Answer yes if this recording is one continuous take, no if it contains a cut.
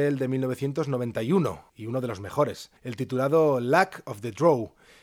no